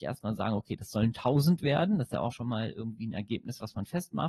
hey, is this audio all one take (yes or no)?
no